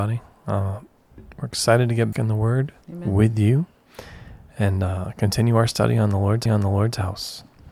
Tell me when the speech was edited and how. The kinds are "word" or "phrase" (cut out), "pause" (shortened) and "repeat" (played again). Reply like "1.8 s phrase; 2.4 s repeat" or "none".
2.1 s word; 2.8 s pause; 6.5 s repeat